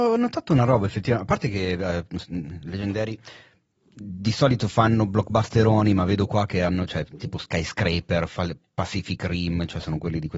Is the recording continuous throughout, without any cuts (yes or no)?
yes